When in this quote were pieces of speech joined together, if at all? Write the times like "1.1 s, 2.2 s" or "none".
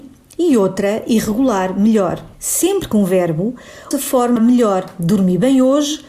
2.3 s, 2.9 s, 3.9 s, 4.4 s